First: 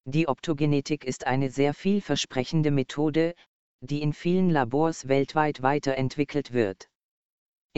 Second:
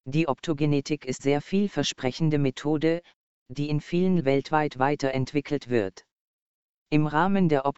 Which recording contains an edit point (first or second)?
second